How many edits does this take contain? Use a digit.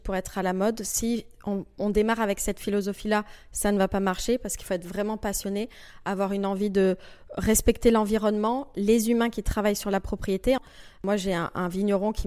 0